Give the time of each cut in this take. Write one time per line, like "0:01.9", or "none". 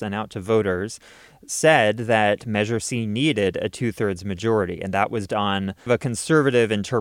0:05.3
0:05.9

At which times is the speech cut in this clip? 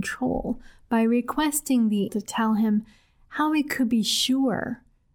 0:02.1

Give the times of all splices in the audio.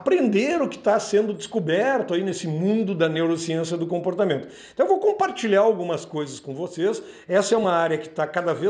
none

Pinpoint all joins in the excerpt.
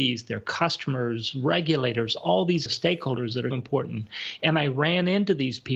0:02.7
0:03.5

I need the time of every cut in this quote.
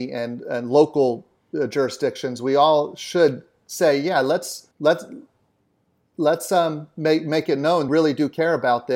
0:04.7
0:07.9

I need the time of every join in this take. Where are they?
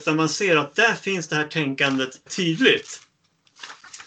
0:02.3

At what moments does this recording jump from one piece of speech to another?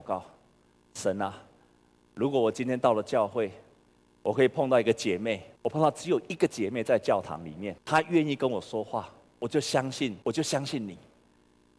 0:05.6
0:07.8
0:10.2

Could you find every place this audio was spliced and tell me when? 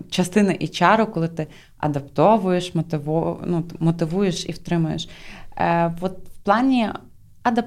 none

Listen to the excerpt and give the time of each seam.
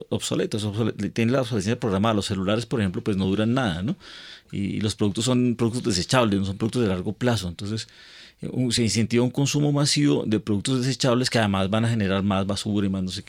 none

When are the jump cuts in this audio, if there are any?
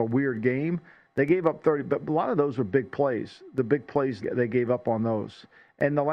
0:04.2

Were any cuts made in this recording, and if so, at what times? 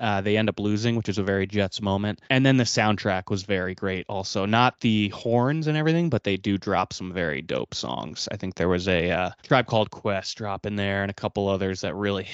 0:02.3
0:09.4

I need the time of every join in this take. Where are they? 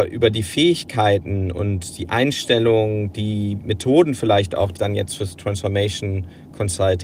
0:04.8

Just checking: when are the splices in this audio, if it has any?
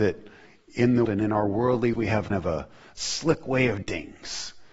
0:01.1
0:01.9
0:02.3
0:03.8

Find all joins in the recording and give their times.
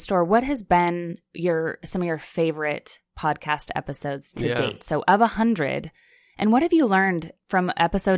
none

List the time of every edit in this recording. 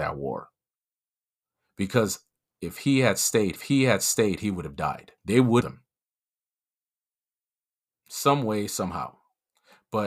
0:03.6
0:05.2
0:05.6

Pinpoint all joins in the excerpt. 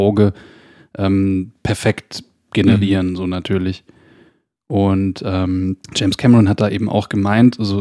0:01.6
0:05.8

